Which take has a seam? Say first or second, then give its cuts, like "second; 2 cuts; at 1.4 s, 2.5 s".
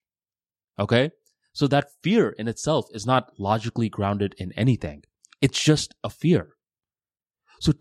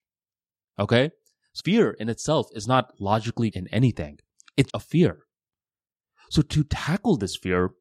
second; 3 cuts; at 1.6 s, 3.5 s, 4.7 s